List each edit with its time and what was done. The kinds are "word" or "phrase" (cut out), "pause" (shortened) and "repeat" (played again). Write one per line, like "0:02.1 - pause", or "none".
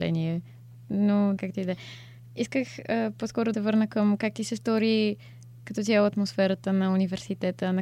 0:01.4 - word
0:03.5 - word